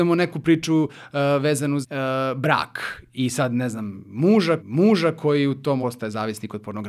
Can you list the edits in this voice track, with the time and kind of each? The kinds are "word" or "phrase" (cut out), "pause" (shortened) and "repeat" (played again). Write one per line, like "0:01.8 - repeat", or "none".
0:01.8 - word
0:04.6 - repeat
0:05.8 - word